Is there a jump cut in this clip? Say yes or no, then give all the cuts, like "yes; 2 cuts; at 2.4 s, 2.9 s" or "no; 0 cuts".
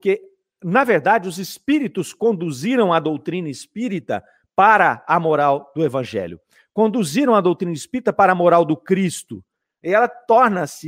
no; 0 cuts